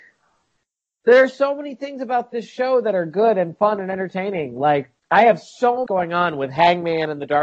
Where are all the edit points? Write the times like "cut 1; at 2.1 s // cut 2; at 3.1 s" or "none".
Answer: cut 1; at 5.0 s // cut 2; at 5.9 s

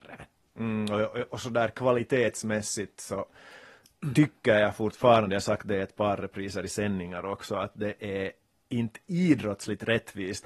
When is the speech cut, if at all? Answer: none

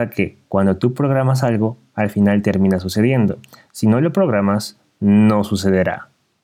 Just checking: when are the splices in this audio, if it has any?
none

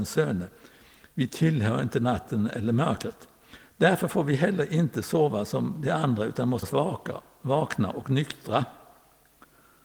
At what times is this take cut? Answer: cut 1; at 6.6 s

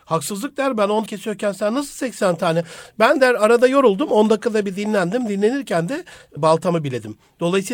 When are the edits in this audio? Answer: cut 1; at 1.1 s // cut 2; at 6.4 s

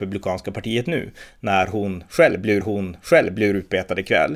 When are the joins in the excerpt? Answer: cut 1; at 2.6 s

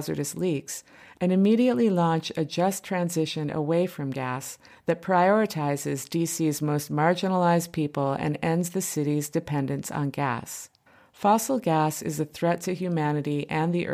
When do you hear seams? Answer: cut 1; at 10.9 s

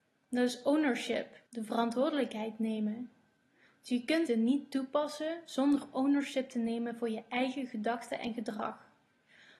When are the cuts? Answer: cut 1; at 1.5 s // cut 2; at 4.3 s

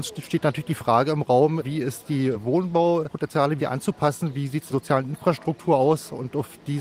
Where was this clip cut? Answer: cut 1; at 3.6 s // cut 2; at 4.7 s

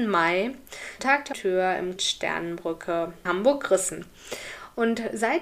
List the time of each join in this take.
cut 1; at 1.0 s // cut 2; at 1.3 s // cut 3; at 2.0 s // cut 4; at 3.2 s

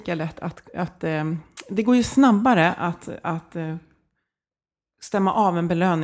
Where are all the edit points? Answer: none

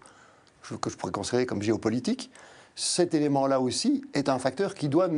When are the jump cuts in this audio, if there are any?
none

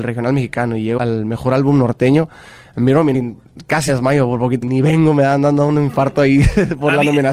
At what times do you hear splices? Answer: cut 1; at 1.0 s // cut 2; at 3.1 s // cut 3; at 3.9 s // cut 4; at 4.6 s

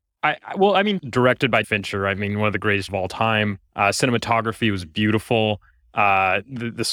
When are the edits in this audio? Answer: cut 1; at 1.0 s // cut 2; at 1.6 s // cut 3; at 2.9 s // cut 4; at 3.7 s

